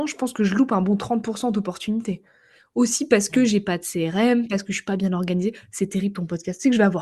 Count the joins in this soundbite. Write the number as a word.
zero